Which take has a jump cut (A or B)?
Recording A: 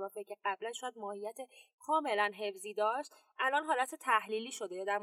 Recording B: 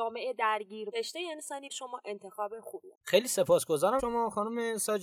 B